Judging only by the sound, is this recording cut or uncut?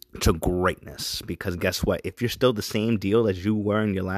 uncut